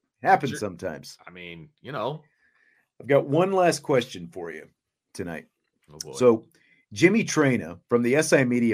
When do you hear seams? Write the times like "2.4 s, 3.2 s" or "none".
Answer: none